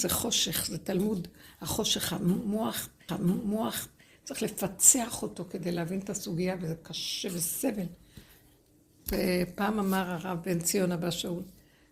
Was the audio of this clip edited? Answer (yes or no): yes